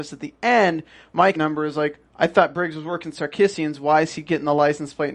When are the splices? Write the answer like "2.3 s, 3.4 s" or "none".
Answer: 1.4 s, 2.1 s